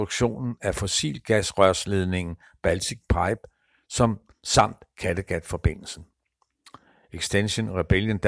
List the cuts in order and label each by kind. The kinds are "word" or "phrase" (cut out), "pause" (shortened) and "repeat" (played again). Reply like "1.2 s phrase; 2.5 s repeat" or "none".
none